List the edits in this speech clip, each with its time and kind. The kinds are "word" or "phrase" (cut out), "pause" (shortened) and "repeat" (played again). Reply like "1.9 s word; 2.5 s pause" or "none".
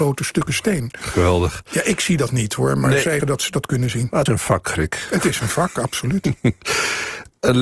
3.2 s word; 4.3 s word